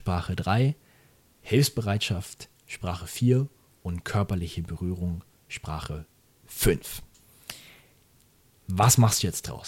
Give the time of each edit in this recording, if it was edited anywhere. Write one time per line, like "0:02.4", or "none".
none